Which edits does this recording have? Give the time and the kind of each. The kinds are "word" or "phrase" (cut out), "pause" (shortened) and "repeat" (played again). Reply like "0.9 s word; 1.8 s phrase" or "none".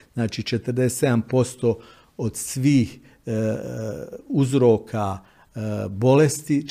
none